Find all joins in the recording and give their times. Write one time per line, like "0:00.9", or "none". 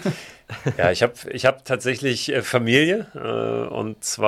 none

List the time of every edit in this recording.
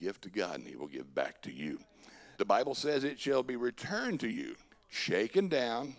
0:02.3
0:04.7

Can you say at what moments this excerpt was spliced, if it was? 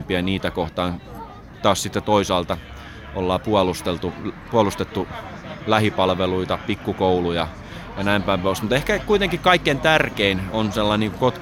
none

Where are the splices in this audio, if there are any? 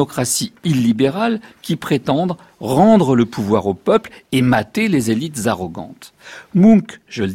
none

